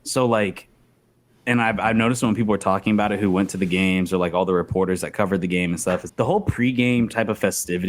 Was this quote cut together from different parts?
yes; 1 cut; at 6.1 s

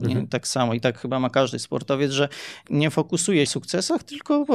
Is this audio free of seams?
no; 2 cuts; at 2.6 s, 3.5 s

